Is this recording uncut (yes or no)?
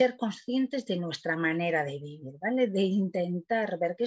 yes